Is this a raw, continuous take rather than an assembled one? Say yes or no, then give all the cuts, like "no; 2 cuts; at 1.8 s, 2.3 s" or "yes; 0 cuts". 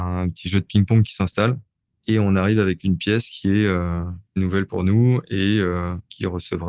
yes; 0 cuts